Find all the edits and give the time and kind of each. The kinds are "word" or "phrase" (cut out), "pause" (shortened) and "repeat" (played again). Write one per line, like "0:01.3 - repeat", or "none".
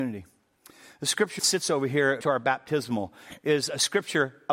0:01.4 - word
0:02.2 - word